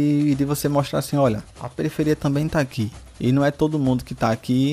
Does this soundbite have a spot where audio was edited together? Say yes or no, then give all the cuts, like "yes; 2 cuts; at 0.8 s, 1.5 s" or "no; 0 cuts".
yes; 1 cut; at 1.5 s